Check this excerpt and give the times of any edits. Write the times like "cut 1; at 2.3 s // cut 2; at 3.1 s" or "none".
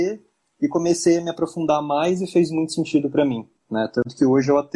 none